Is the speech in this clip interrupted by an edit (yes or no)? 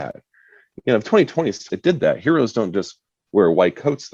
yes